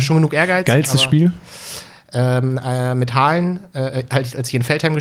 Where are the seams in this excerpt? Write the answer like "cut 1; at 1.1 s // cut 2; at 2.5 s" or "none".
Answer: none